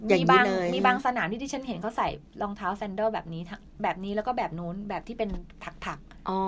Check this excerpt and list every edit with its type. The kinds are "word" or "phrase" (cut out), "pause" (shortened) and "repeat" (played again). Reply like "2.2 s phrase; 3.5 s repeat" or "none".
none